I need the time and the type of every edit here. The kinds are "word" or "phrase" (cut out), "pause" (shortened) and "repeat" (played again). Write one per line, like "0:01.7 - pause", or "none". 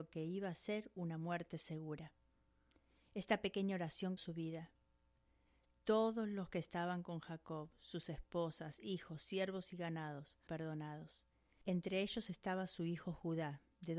0:04.2 - word
0:10.5 - word